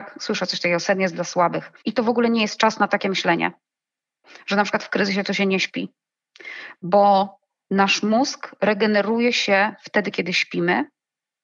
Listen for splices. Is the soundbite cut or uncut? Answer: cut